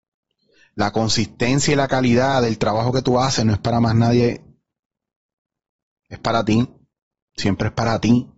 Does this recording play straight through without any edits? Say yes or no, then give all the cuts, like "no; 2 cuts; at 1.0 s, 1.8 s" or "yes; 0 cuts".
yes; 0 cuts